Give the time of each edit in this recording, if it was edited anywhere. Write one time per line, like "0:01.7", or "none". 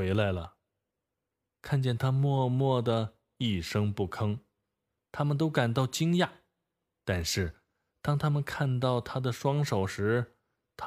none